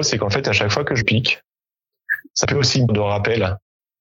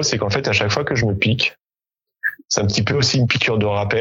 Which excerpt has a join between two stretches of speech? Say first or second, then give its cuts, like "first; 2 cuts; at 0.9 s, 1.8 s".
first; 3 cuts; at 1.0 s, 2.4 s, 2.9 s